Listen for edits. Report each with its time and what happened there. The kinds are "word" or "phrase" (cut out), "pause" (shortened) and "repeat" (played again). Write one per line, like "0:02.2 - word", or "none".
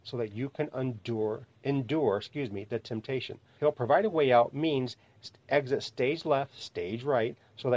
0:03.6 - word